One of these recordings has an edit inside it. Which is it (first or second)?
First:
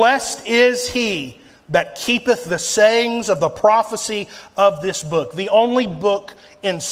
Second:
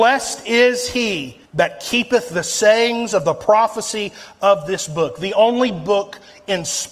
second